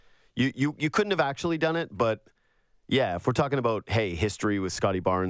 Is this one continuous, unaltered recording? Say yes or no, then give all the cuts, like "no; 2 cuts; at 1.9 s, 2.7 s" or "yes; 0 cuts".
yes; 0 cuts